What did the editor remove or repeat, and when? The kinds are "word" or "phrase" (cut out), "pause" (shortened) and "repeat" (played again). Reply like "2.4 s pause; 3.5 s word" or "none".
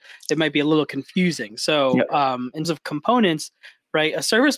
2.6 s word